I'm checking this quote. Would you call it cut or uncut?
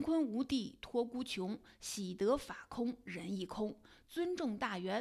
uncut